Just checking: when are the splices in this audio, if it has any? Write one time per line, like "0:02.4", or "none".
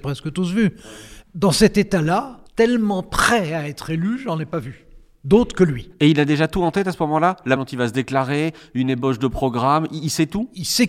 0:02.5
0:07.6